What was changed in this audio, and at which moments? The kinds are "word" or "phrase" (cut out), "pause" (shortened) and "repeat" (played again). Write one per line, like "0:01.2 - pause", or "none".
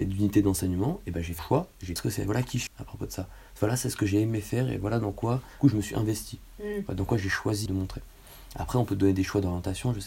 0:01.4 - word
0:02.0 - phrase
0:02.7 - word
0:05.6 - word
0:07.7 - word